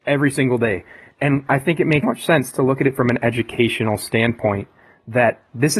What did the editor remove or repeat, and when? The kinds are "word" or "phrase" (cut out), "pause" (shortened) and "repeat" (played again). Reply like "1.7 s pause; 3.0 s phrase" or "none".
2.0 s word

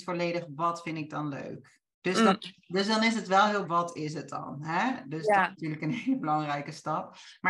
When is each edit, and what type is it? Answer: 3.6 s word; 5.5 s word

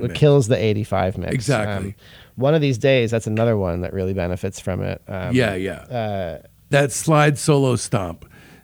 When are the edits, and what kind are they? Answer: none

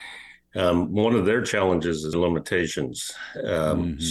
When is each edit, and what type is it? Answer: 2.1 s word

